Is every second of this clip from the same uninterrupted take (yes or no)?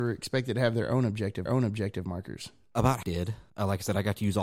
no